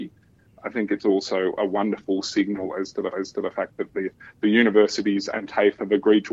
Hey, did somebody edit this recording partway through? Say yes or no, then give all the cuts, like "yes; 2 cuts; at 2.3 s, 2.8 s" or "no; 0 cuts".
yes; 1 cut; at 3.1 s